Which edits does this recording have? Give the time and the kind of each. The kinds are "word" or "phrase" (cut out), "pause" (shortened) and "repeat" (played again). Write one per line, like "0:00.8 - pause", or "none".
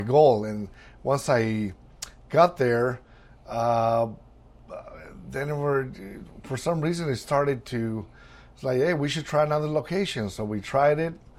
none